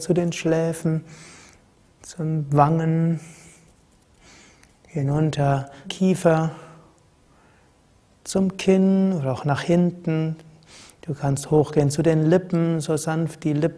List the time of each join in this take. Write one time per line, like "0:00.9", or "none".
0:05.8

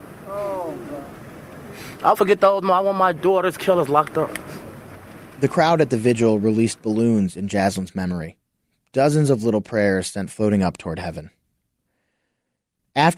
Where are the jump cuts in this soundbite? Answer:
0:02.1

